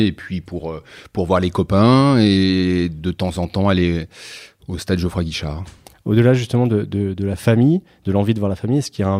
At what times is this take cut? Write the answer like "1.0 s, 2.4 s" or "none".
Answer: none